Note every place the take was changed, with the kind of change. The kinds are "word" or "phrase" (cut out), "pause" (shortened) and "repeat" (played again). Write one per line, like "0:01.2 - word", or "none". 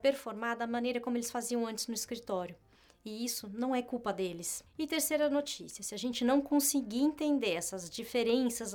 none